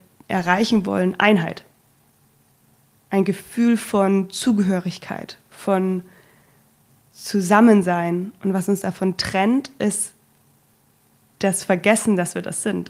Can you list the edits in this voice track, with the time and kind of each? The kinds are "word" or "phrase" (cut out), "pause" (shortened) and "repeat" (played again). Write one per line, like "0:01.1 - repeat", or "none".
none